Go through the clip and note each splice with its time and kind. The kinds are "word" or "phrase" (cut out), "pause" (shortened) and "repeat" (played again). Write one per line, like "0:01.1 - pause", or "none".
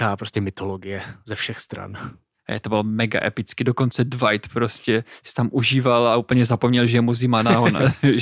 none

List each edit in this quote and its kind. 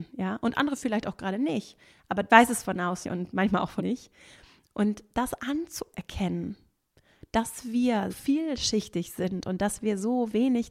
0:02.3 - word
0:03.0 - word
0:03.8 - word
0:08.1 - word

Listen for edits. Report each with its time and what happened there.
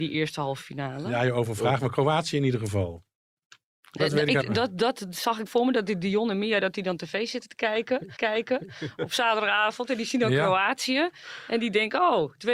0:04.0 - word
0:04.4 - word
0:05.5 - phrase
0:08.2 - repeat

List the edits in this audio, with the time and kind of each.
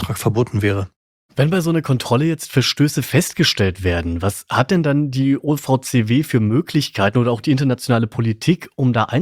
none

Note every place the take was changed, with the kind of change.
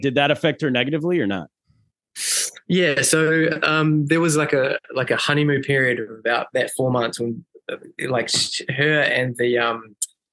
none

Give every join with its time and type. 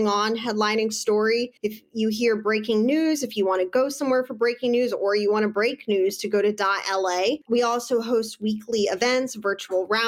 0:01.6 - pause
0:07.4 - pause

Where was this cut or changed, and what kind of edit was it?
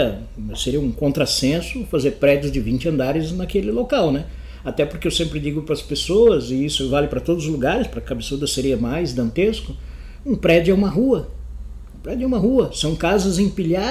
none

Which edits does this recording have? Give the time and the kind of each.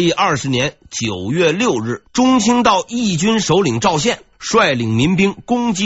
0:02.1 - pause
0:04.3 - pause

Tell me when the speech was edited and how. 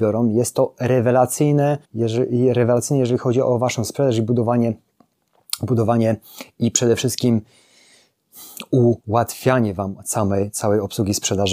0:01.8 - pause
0:09.0 - pause

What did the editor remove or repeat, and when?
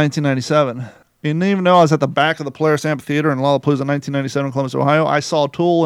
0:01.0 - pause

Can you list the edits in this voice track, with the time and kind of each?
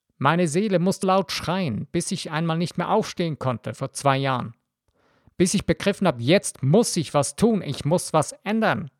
0:01.0 - word

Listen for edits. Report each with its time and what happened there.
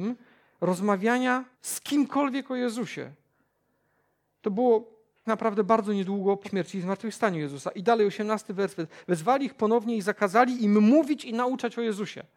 0:01.5 - pause
0:05.2 - word
0:06.4 - word

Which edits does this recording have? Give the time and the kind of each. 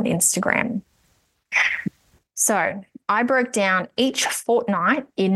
none

